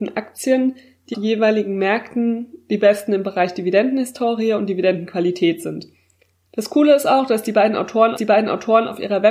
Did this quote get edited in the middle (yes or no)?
yes